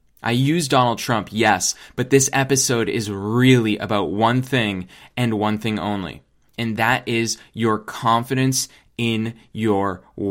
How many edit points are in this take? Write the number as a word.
zero